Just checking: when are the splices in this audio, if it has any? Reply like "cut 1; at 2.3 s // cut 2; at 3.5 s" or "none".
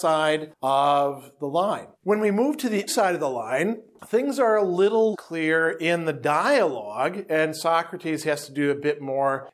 cut 1; at 1.9 s // cut 2; at 2.9 s // cut 3; at 5.1 s